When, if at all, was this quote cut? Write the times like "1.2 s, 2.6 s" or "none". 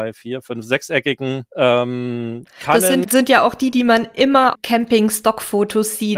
1.5 s, 3.0 s, 4.5 s